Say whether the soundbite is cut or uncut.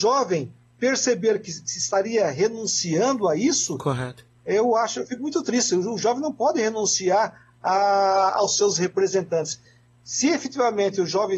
uncut